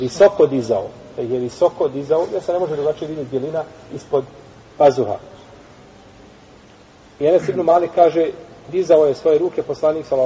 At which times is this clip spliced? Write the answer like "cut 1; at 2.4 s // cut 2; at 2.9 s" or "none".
none